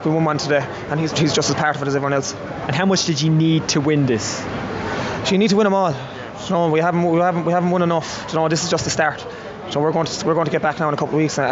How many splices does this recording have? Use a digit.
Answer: 1